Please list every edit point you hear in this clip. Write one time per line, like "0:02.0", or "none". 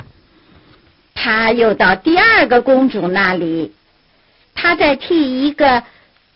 none